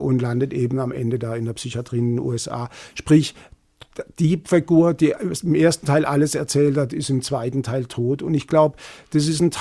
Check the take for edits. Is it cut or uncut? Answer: uncut